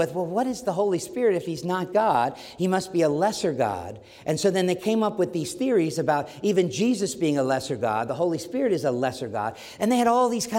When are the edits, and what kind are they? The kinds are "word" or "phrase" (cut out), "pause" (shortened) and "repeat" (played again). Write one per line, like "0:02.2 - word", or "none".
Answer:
none

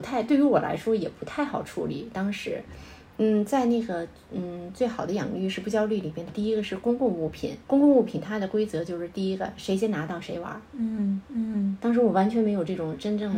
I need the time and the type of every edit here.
0:06.3 - phrase
0:07.6 - pause
0:11.2 - repeat

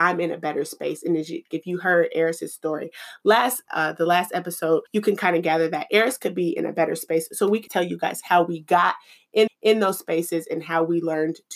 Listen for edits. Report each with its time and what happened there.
0:01.5 - word
0:03.7 - word
0:04.9 - pause
0:07.7 - word
0:09.5 - repeat

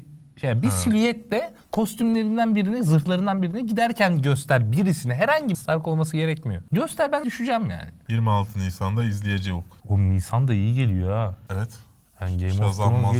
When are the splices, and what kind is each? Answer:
0:01.6 - pause
0:05.5 - word
0:07.2 - phrase
0:09.8 - pause

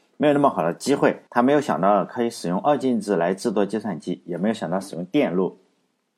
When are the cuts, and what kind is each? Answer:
0:01.3 - pause

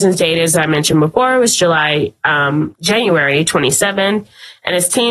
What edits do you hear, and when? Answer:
none

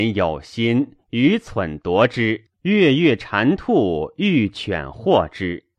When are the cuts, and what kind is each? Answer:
0:02.5 - pause

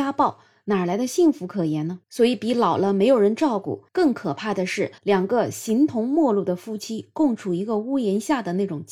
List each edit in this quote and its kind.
0:02.0 - pause
0:03.9 - pause
0:05.0 - pause

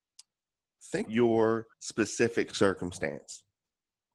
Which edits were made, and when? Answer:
0:01.1 - word
0:01.7 - pause

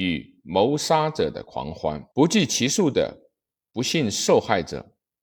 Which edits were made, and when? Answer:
0:02.1 - pause

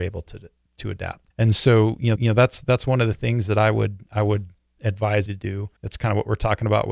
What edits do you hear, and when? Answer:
0:01.3 - pause
0:02.2 - repeat
0:05.3 - word
0:05.8 - pause

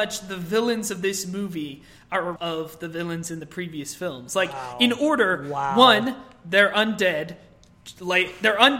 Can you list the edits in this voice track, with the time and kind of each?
0:02.4 - word

